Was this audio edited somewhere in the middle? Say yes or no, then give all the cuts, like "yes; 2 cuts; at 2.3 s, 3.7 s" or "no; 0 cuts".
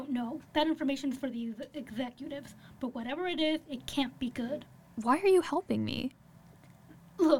no; 0 cuts